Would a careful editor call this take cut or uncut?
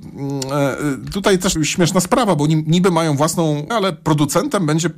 cut